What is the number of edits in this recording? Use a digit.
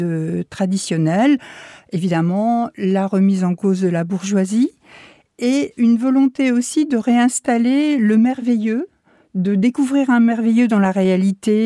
1